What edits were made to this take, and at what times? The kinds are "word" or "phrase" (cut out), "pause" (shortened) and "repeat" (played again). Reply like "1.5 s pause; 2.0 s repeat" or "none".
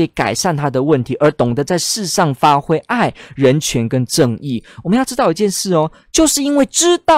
none